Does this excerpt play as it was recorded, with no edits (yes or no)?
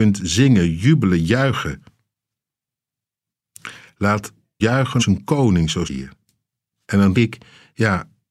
no